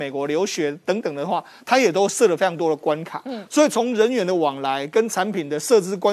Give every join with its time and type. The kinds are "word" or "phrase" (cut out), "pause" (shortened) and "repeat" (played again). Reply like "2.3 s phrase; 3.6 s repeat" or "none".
none